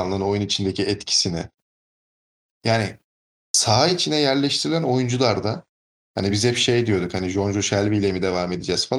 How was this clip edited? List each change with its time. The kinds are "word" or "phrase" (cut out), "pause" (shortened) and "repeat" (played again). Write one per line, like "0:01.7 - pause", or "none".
none